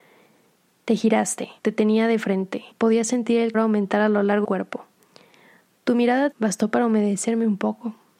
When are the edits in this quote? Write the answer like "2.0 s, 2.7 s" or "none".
1.6 s, 2.7 s, 3.5 s, 4.4 s, 6.3 s